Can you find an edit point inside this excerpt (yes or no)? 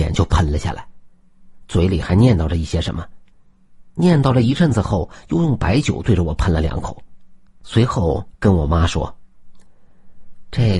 no